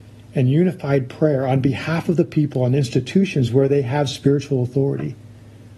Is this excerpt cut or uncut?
uncut